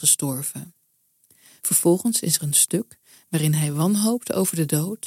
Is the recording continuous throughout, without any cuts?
yes; 0 cuts

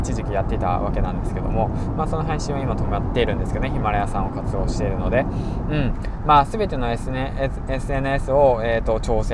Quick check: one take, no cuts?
yes; 0 cuts

